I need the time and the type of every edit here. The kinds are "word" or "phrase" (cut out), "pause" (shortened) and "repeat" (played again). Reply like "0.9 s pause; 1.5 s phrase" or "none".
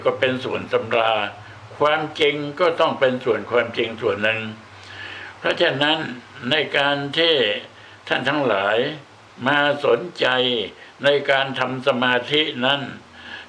none